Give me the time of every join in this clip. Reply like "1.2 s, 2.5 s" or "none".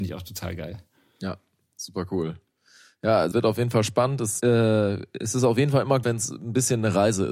3.3 s, 4.4 s, 6.0 s